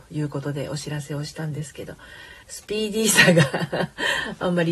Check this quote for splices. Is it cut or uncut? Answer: cut